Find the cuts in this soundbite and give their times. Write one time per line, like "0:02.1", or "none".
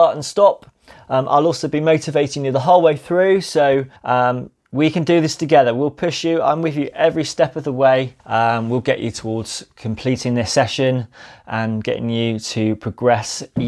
0:04.0
0:08.2